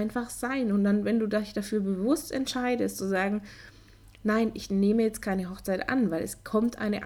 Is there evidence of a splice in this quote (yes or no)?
no